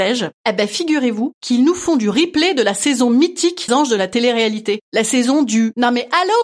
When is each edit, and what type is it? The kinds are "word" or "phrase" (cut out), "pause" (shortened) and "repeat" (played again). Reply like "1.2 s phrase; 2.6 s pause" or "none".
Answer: 3.7 s word